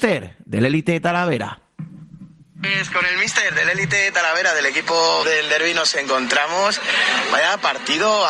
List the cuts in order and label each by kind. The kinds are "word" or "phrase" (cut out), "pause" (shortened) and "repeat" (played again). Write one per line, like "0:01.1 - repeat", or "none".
0:05.2 - word